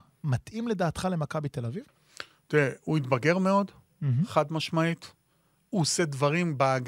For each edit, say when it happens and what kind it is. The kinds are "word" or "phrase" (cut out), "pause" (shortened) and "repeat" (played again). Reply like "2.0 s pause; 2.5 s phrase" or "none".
none